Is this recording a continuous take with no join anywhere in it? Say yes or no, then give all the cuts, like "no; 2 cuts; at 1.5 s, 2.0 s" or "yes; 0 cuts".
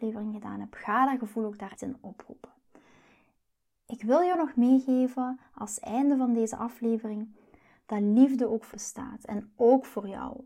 no; 2 cuts; at 1.8 s, 8.7 s